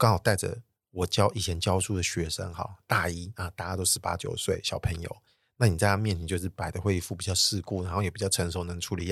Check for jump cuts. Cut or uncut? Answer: uncut